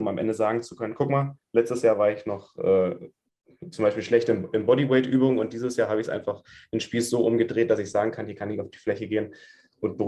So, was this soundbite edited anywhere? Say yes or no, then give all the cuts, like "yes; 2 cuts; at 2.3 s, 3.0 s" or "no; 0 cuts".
no; 0 cuts